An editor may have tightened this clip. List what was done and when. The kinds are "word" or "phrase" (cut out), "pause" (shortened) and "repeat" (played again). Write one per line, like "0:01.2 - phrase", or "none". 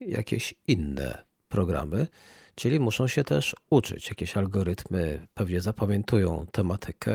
none

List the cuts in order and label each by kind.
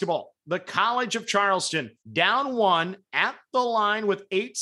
0:02.0 - pause

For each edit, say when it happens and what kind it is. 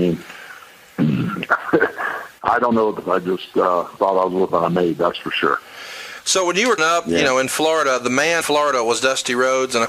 0:03.0 - word
0:04.0 - word
0:04.5 - word
0:06.8 - word
0:08.4 - word

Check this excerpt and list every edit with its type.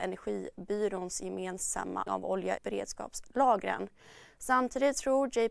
0:02.1 - word
0:02.6 - word

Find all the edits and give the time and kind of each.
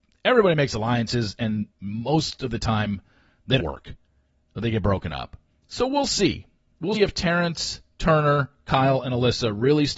0:01.7 - pause
0:03.6 - word
0:05.5 - pause
0:06.9 - word

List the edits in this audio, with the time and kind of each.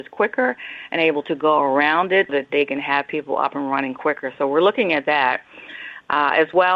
0:02.3 - word

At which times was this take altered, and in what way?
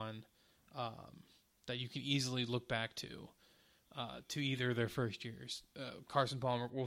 none

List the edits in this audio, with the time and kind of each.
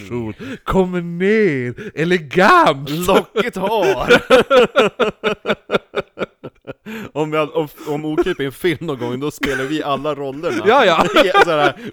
none

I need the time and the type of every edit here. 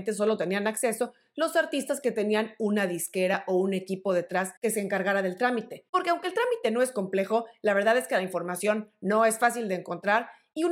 0:04.6 - pause
0:05.9 - pause

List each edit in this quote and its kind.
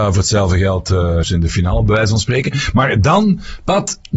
0:01.2 - phrase

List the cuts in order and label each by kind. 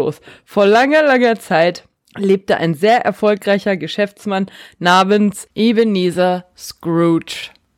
0:02.0 - pause

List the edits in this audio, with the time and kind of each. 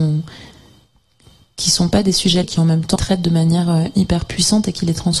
0:02.4 - word
0:03.0 - word

